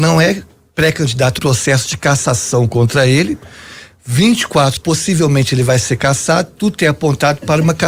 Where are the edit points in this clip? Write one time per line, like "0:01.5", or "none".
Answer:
0:01.4
0:04.8